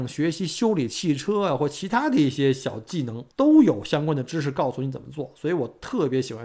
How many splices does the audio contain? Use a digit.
1